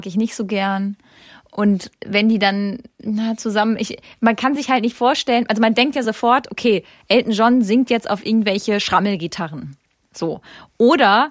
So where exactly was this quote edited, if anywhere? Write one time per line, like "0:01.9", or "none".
none